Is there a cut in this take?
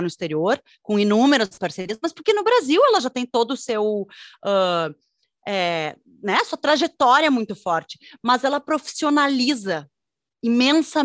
no; 0 cuts

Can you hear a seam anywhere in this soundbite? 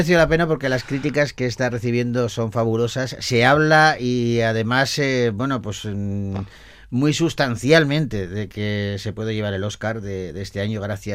no; 0 cuts

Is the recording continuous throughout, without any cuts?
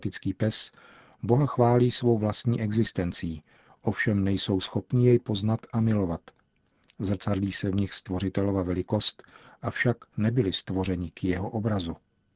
yes; 0 cuts

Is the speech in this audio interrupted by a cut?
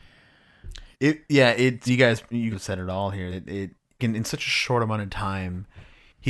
yes; 5 cuts; at 0.9 s, 1.9 s, 2.5 s, 3.3 s, 4.0 s

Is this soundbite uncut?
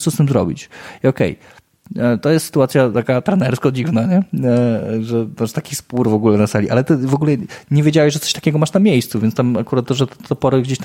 yes; 0 cuts

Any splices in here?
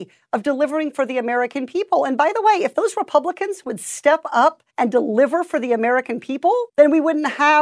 yes; 2 cuts; at 4.7 s, 6.7 s

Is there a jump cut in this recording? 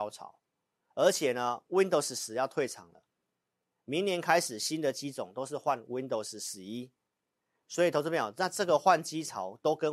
no; 0 cuts

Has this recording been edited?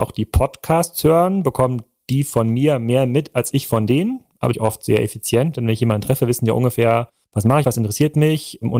yes; 3 cuts; at 4.5 s, 7.2 s, 7.6 s

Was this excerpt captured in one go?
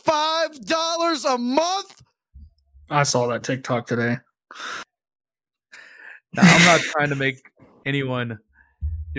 yes; 0 cuts

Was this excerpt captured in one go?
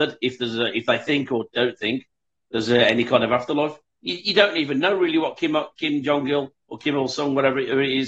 yes; 0 cuts

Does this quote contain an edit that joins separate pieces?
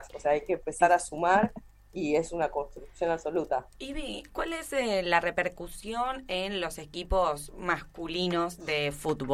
no; 0 cuts

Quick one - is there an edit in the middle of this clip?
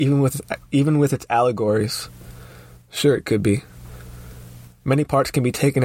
no; 0 cuts

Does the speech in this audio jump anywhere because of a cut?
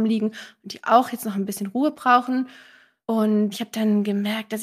no; 0 cuts

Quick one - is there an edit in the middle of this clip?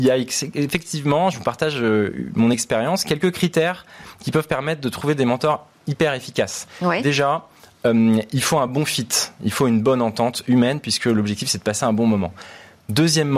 no; 0 cuts

